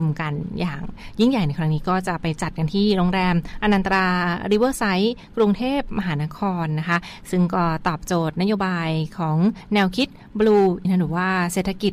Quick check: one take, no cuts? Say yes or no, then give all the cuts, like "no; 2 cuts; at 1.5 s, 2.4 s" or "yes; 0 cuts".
no; 1 cut; at 10.8 s